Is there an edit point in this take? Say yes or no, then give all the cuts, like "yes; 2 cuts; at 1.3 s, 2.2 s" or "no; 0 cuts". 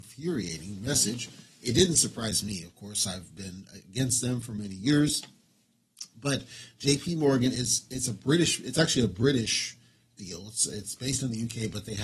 no; 0 cuts